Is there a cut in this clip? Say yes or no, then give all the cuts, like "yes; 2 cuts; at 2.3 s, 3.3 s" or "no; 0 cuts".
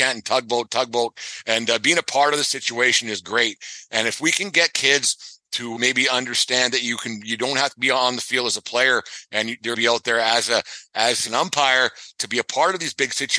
yes; 3 cuts; at 5.8 s, 9.7 s, 11.3 s